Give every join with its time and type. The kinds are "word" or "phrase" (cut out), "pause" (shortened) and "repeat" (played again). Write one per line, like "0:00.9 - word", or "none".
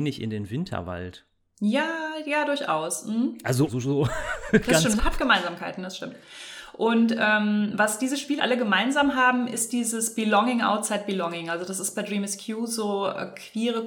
0:03.7 - word
0:05.0 - word
0:08.4 - word